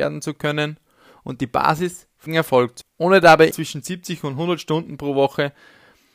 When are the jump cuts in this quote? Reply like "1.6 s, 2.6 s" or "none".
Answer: 2.3 s, 2.8 s, 3.5 s